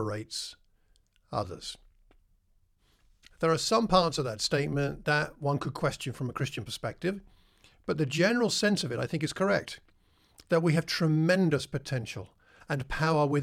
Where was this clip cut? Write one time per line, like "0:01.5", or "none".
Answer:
none